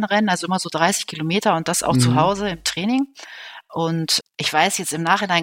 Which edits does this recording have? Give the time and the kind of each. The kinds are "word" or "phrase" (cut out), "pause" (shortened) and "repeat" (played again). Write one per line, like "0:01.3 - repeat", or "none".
0:04.2 - word